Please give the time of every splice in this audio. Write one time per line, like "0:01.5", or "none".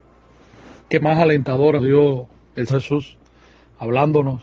0:01.0
0:01.8
0:02.7